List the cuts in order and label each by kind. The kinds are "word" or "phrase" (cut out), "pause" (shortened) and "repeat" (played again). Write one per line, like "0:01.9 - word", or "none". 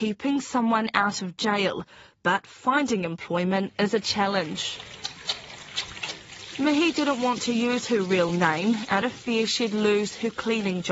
none